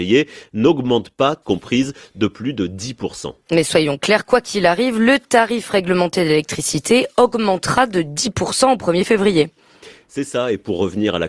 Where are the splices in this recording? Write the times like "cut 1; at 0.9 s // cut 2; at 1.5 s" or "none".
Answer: cut 1; at 1.4 s